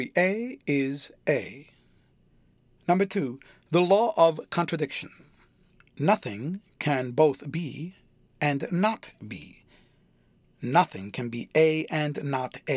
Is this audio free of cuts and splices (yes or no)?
yes